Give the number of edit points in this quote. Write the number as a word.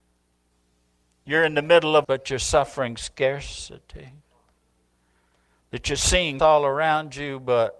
two